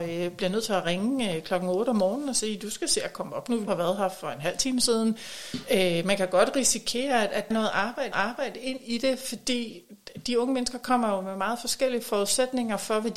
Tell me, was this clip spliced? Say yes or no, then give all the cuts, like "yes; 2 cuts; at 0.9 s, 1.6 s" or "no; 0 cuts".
yes; 3 cuts; at 3.7 s, 7.5 s, 8.1 s